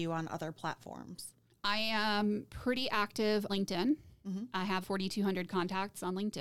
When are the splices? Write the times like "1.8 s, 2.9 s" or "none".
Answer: 1.6 s, 3.5 s, 4.8 s

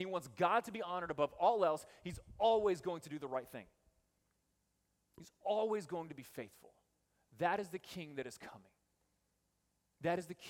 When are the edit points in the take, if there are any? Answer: none

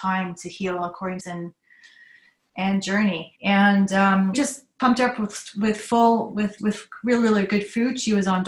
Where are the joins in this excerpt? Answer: 1.2 s, 3.3 s, 4.3 s, 6.6 s

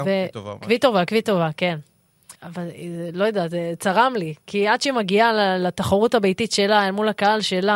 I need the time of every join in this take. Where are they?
2.3 s

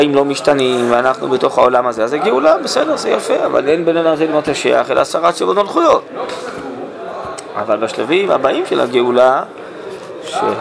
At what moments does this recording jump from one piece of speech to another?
none

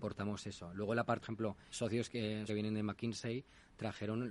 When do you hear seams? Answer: 1.2 s, 1.7 s, 2.5 s

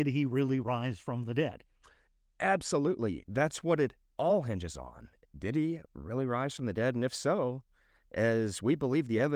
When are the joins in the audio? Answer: none

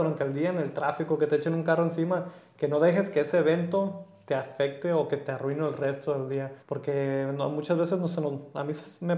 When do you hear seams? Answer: 6.6 s

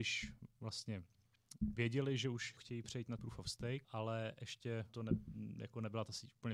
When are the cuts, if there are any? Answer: 2.6 s, 3.2 s, 3.8 s, 4.9 s

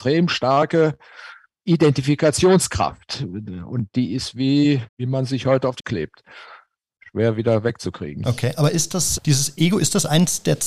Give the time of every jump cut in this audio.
4.9 s, 5.8 s, 9.2 s

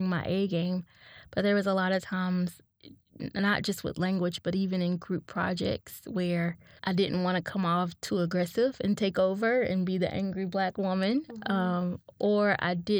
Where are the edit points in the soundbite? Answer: none

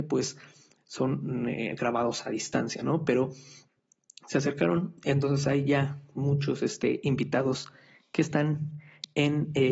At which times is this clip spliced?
none

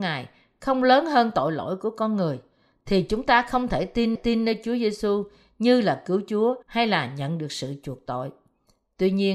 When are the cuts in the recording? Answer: 4.2 s, 6.6 s

